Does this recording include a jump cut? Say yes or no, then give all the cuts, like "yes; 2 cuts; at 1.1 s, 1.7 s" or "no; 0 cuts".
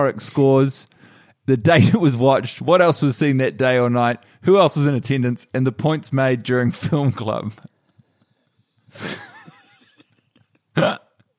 no; 0 cuts